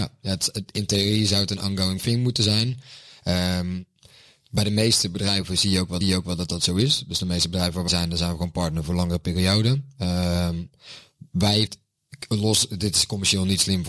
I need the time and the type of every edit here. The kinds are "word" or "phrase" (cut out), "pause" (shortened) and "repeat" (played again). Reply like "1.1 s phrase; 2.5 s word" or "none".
6.0 s repeat; 7.9 s word; 11.7 s word